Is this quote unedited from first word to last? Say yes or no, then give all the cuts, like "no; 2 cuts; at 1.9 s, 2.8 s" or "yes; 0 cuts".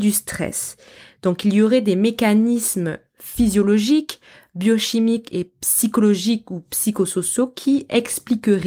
yes; 0 cuts